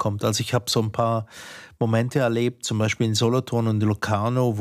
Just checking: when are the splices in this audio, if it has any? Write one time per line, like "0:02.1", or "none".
none